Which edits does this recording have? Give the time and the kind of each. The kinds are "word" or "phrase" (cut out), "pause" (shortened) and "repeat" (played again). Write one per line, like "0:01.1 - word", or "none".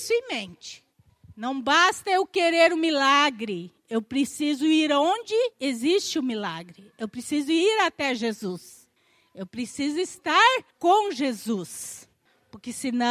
0:05.5 - pause
0:10.7 - pause